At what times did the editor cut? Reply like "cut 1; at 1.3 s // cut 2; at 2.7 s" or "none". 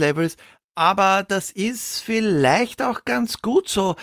none